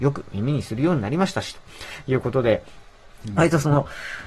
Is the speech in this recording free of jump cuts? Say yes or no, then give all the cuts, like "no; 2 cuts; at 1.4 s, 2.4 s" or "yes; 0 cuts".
yes; 0 cuts